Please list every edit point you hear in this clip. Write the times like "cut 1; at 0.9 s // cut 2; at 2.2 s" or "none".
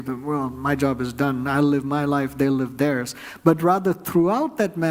none